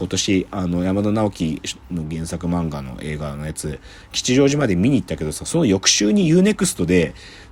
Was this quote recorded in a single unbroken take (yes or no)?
yes